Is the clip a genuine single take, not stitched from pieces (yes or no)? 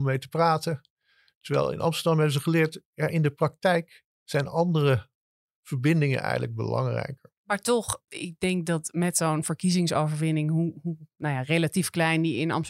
no